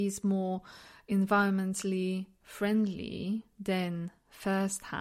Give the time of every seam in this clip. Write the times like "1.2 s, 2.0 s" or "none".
3.5 s